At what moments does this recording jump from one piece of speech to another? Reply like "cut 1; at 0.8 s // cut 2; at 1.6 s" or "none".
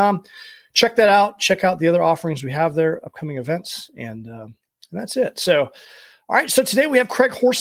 none